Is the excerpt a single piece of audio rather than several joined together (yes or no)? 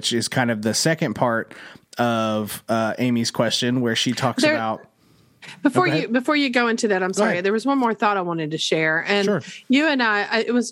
yes